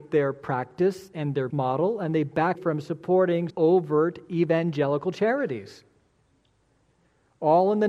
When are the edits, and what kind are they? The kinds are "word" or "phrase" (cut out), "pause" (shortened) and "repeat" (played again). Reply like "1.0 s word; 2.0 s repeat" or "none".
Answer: 1.5 s word; 2.5 s word; 3.5 s word